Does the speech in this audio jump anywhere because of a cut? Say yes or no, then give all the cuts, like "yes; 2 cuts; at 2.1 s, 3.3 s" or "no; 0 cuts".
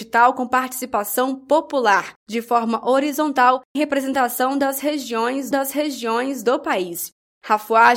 yes; 3 cuts; at 2.2 s, 3.7 s, 5.5 s